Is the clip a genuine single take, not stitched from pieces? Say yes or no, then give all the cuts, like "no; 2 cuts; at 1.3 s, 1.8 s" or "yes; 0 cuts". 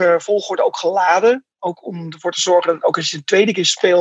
yes; 0 cuts